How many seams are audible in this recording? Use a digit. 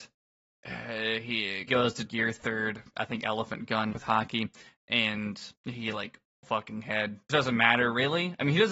6